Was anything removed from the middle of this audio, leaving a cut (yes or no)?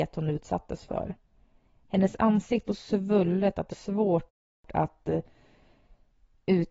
yes